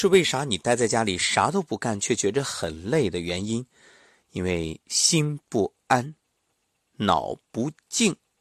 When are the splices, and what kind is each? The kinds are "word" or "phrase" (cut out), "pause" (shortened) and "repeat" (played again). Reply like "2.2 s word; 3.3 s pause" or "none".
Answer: none